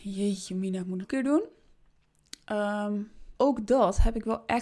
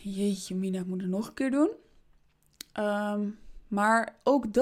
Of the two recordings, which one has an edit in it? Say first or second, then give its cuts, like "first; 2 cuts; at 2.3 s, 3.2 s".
first; 2 cuts; at 1.0 s, 3.3 s